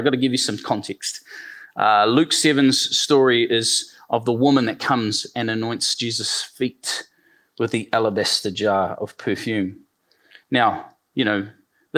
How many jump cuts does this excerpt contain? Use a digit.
0